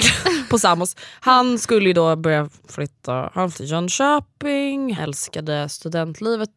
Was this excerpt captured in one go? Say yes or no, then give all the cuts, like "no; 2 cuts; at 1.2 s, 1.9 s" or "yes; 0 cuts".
no; 3 cuts; at 2.6 s, 3.5 s, 5.0 s